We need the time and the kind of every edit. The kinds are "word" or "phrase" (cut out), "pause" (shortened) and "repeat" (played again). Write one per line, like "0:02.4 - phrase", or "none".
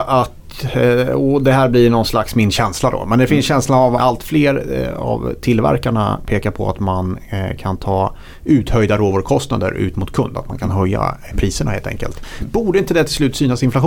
0:04.0 - phrase
0:11.3 - word